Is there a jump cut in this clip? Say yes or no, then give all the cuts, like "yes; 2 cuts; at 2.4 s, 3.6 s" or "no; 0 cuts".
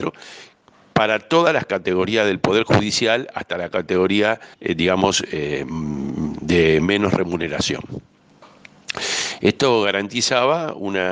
yes; 1 cut; at 4.5 s